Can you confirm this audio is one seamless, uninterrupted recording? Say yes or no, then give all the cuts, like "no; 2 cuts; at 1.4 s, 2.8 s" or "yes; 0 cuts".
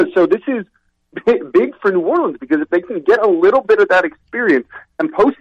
yes; 0 cuts